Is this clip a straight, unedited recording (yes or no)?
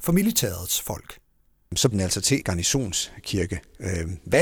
no